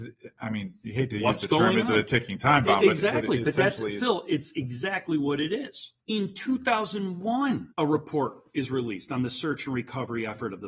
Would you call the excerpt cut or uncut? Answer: cut